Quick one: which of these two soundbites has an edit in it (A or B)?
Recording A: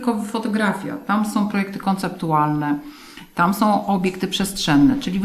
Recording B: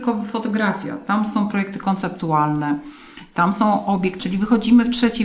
B